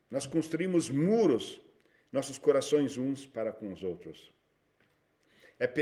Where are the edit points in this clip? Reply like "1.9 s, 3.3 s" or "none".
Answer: none